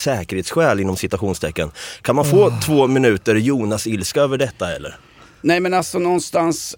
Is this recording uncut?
yes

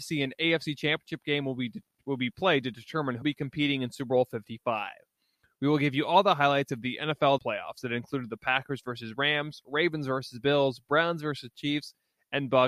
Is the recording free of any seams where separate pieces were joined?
no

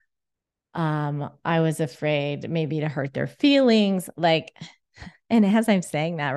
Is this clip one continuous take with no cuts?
yes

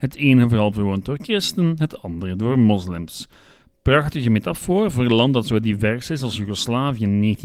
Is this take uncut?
yes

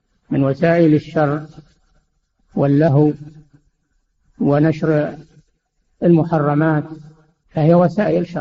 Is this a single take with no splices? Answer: yes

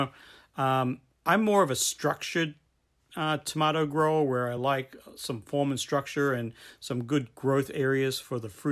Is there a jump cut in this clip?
no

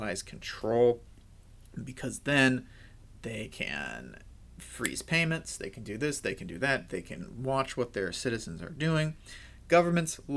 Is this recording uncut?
yes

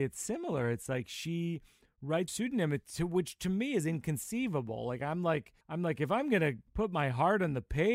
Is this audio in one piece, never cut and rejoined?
no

